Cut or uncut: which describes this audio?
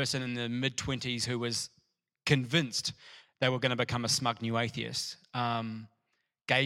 uncut